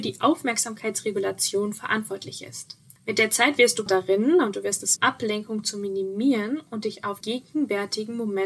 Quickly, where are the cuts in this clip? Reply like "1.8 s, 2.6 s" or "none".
3.0 s, 3.9 s, 5.0 s, 7.2 s